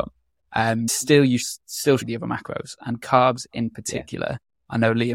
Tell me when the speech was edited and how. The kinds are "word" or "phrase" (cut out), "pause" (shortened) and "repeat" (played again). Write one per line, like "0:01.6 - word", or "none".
0:01.4 - word
0:02.0 - phrase